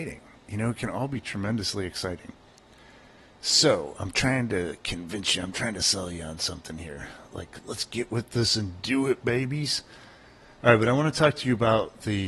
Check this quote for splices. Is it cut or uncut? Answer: uncut